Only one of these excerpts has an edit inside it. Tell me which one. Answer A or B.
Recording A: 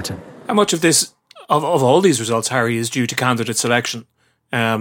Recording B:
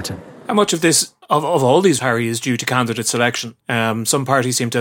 B